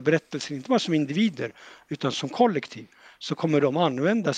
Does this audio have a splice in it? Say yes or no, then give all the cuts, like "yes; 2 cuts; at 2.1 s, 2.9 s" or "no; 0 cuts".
no; 0 cuts